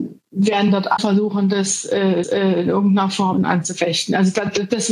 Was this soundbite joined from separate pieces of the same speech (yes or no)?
yes